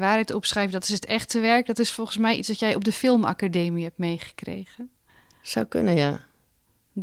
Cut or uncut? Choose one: cut